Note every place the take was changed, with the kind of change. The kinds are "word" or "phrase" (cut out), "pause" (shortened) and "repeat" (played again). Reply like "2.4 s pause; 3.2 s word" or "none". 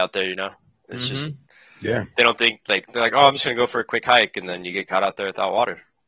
none